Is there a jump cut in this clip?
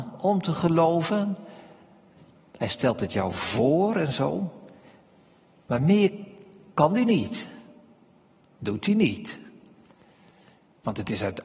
no; 0 cuts

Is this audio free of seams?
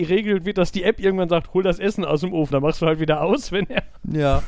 no; 1 cut; at 2.5 s

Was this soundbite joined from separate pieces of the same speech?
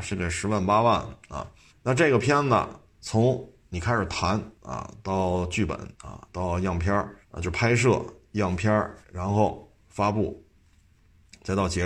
yes; 5 cuts; at 1.7 s, 4.5 s, 5.9 s, 7.2 s, 9.0 s

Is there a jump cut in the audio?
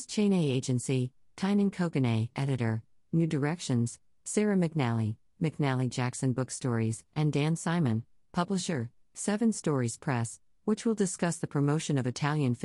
no; 0 cuts

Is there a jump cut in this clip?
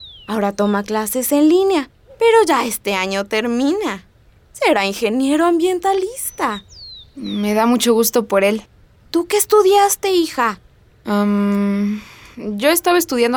no; 0 cuts

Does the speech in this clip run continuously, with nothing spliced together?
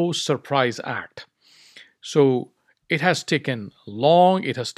yes; 0 cuts

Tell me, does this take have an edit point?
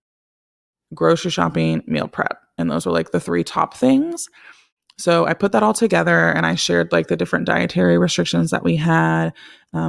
no; 0 cuts

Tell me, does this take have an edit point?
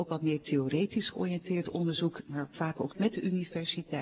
yes; 1 cut; at 2.9 s

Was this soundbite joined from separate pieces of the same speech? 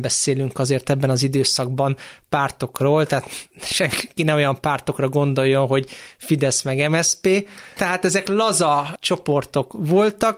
no; 0 cuts

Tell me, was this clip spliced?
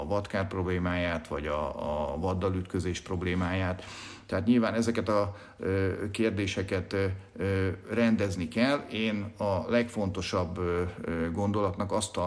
no; 0 cuts

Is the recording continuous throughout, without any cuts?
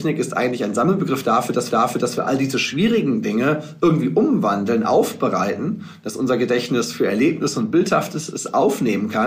no; 1 cut; at 1.7 s

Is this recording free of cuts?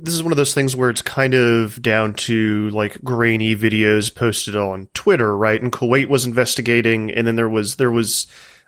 yes; 0 cuts

